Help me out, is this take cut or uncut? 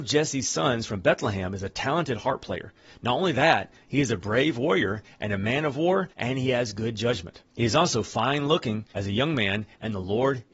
cut